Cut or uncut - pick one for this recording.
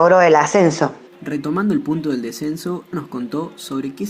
cut